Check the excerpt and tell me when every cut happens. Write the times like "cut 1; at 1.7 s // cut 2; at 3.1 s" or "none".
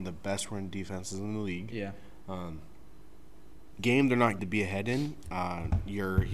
cut 1; at 3.8 s // cut 2; at 4.4 s